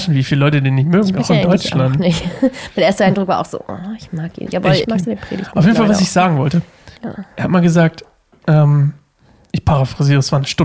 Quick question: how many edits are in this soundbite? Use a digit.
2